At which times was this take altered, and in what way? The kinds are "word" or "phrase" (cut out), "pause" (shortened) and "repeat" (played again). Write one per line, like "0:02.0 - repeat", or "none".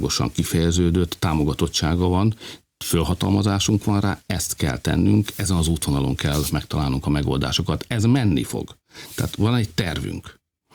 none